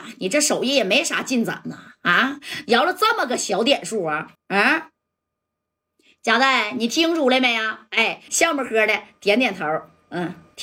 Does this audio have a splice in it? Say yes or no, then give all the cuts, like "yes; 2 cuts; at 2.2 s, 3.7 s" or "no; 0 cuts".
yes; 2 cuts; at 4.3 s, 8.3 s